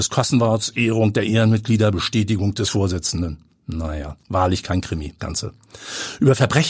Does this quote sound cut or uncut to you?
cut